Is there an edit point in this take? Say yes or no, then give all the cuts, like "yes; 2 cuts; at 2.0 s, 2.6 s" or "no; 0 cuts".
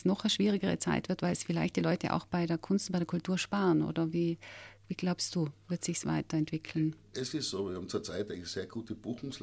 no; 0 cuts